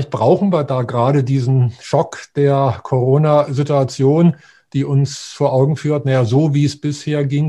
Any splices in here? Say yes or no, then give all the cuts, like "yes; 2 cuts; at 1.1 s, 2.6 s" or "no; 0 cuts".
no; 0 cuts